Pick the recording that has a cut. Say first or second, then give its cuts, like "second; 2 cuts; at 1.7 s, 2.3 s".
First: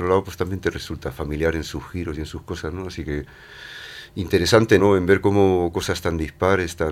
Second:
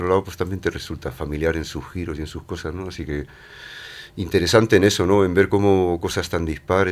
first; 1 cut; at 4.8 s